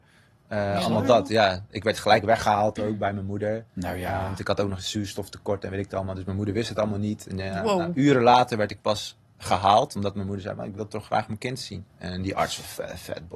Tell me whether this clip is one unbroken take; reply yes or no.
no